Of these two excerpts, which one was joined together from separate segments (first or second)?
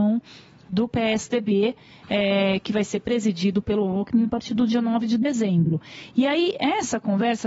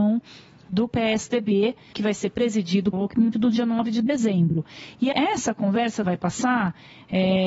second